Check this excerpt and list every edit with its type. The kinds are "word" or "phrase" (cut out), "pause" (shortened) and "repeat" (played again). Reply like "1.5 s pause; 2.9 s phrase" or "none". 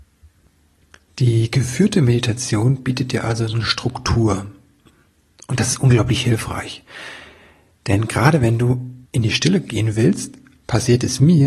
9.1 s pause

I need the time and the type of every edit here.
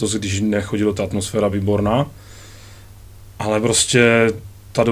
0.9 s phrase; 1.5 s word

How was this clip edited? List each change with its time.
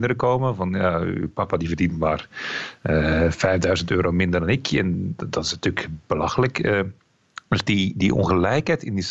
none

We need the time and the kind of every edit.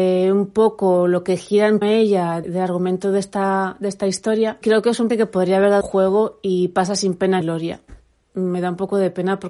1.8 s word; 2.4 s word; 4.6 s word; 5.1 s word; 5.8 s word; 7.4 s word

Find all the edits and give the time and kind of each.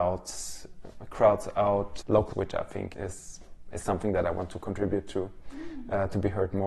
2.0 s word; 2.3 s phrase; 2.9 s word

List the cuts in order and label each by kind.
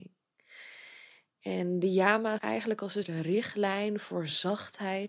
2.4 s word; 3.0 s word

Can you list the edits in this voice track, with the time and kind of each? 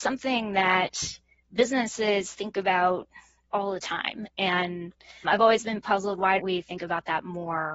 5.2 s word; 6.4 s word

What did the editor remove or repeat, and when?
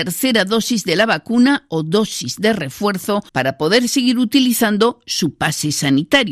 3.3 s pause

